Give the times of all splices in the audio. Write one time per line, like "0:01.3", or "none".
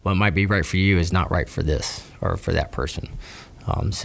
none